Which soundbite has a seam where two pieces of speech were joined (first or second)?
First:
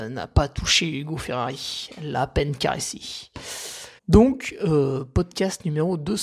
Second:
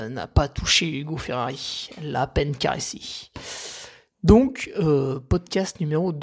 first